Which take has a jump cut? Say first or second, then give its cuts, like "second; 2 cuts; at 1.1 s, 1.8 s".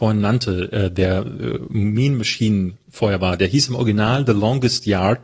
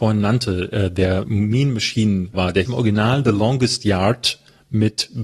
second; 3 cuts; at 1.2 s, 2.3 s, 2.7 s